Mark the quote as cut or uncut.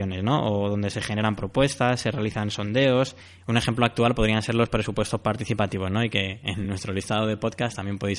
uncut